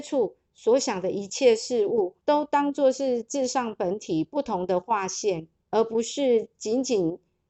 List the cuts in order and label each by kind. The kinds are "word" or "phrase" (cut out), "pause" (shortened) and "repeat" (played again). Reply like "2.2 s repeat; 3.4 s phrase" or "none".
2.2 s pause; 5.6 s pause